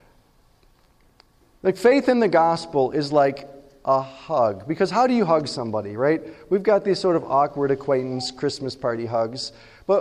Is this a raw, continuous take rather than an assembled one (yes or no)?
yes